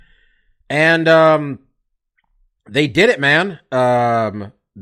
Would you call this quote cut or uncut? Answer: uncut